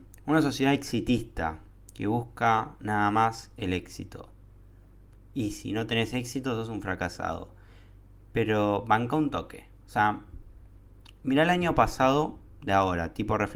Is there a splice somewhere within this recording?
no; 0 cuts

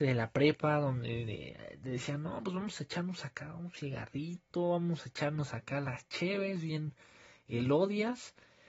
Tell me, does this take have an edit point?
no; 0 cuts

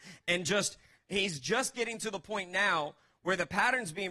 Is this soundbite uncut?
yes; 0 cuts

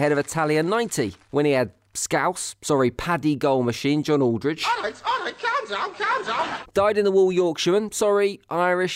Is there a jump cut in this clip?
yes; 1 cut; at 1.2 s

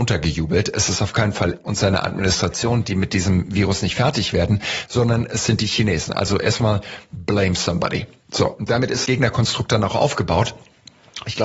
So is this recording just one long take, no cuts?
no; 2 cuts; at 1.6 s, 9.0 s

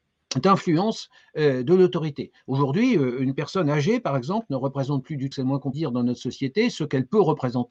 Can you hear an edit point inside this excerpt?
yes; 2 cuts; at 5.3 s, 5.7 s

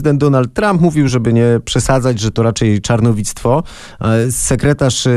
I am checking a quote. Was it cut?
no; 0 cuts

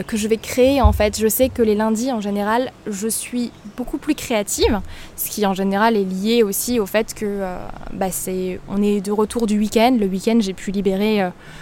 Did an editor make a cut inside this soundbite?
no; 0 cuts

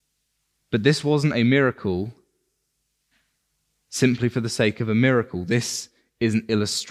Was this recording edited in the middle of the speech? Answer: no; 0 cuts

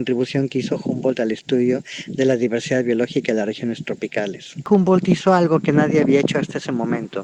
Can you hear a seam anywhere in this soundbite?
no; 0 cuts

